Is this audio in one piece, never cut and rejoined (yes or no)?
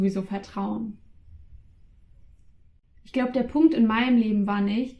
yes